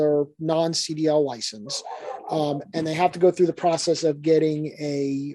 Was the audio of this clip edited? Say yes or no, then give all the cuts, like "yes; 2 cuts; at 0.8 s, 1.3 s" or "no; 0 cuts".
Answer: no; 0 cuts